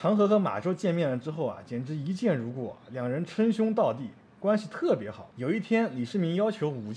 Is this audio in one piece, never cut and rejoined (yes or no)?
yes